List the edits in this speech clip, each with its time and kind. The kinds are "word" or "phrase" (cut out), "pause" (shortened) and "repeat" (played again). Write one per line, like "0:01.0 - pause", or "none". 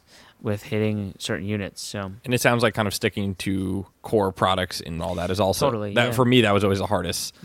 0:03.9 - pause